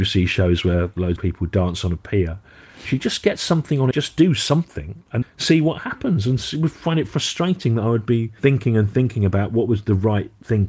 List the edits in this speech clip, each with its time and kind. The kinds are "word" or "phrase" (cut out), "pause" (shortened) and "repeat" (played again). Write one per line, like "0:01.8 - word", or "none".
0:01.2 - phrase
0:03.0 - phrase
0:03.9 - phrase
0:05.2 - word